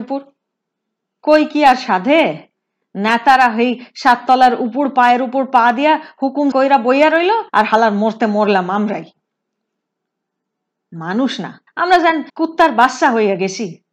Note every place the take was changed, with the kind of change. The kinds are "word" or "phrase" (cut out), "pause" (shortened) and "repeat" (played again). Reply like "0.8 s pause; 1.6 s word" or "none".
6.5 s word; 7.5 s pause; 11.7 s pause; 12.3 s pause

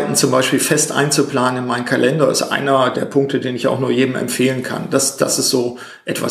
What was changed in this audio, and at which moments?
2.9 s word

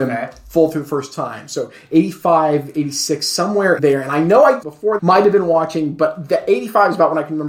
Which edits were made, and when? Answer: 3.8 s word; 4.6 s phrase; 5.0 s word

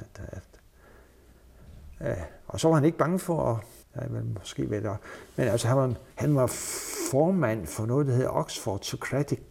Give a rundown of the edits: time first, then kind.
3.8 s pause; 6.1 s pause

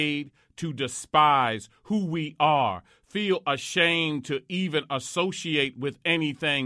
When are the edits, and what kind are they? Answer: none

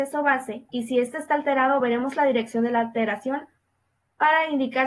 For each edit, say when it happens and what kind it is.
none

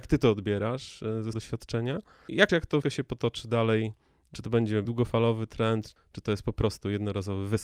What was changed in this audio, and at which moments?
1.3 s word; 2.5 s word; 2.8 s word; 4.9 s word; 6.0 s word

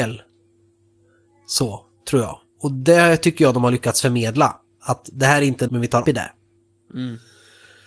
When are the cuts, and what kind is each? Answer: 5.7 s word; 6.0 s word

